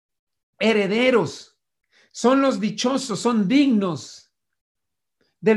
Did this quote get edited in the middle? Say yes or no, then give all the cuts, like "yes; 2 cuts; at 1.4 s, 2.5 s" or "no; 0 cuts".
no; 0 cuts